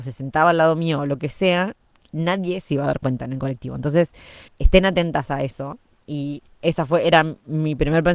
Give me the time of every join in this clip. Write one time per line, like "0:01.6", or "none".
0:04.5